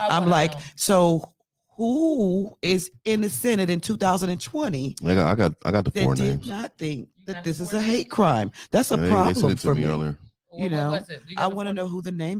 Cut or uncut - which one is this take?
cut